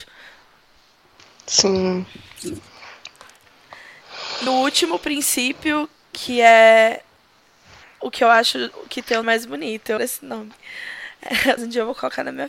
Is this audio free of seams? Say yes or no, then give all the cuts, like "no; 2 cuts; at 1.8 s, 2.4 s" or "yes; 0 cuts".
no; 4 cuts; at 4.5 s, 9.2 s, 10.0 s, 11.6 s